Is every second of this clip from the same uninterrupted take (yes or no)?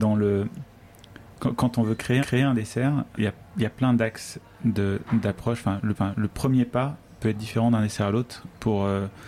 no